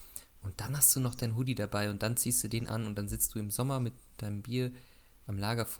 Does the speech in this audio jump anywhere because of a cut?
no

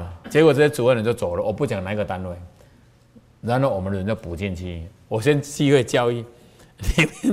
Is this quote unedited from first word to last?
yes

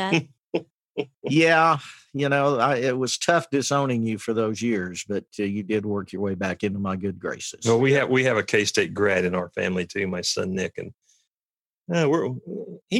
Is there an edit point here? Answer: no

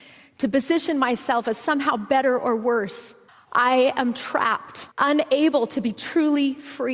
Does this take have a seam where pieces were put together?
yes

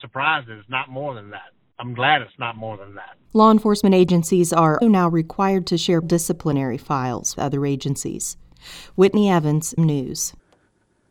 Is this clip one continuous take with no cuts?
no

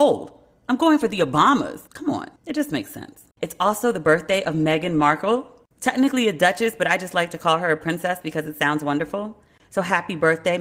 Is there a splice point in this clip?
yes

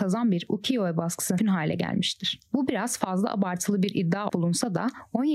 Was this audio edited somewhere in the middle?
yes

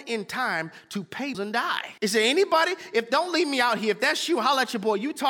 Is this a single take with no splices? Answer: no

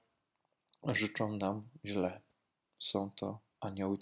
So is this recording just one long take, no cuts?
yes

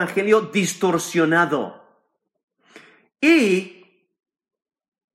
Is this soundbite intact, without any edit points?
yes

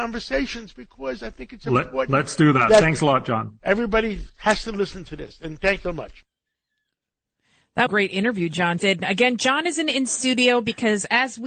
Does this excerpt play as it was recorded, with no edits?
no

